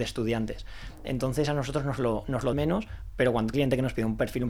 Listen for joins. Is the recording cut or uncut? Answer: cut